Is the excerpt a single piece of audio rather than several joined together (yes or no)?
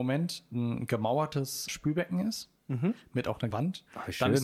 no